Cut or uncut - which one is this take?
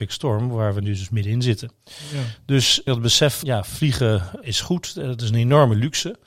cut